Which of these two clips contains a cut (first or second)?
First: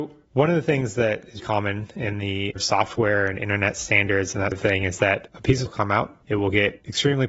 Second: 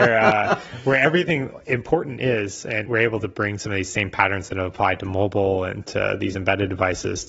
first